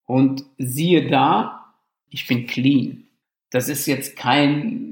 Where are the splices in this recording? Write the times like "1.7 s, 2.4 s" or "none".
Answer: 2.1 s